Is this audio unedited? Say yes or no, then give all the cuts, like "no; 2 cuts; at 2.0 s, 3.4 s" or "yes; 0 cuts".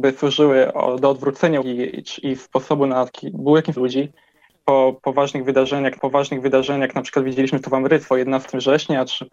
no; 4 cuts; at 1.6 s, 3.8 s, 6.0 s, 8.1 s